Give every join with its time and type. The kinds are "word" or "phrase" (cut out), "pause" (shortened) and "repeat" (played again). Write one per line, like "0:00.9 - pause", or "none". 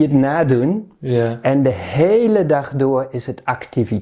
none